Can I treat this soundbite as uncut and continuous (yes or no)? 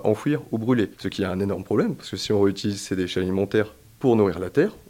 yes